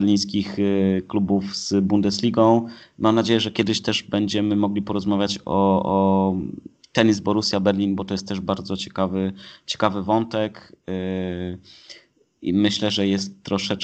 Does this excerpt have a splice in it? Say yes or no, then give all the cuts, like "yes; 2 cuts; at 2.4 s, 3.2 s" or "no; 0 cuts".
no; 0 cuts